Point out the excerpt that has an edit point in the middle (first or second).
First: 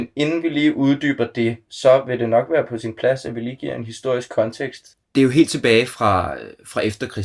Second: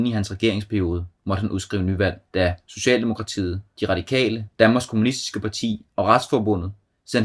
first